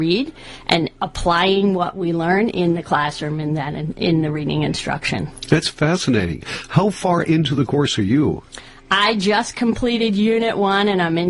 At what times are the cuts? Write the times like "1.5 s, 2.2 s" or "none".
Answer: none